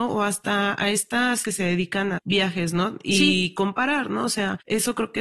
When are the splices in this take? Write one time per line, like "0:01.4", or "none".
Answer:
0:01.4
0:02.2